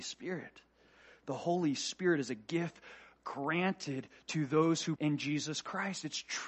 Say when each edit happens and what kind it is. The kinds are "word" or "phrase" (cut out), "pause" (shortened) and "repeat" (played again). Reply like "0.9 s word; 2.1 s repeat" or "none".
5.0 s phrase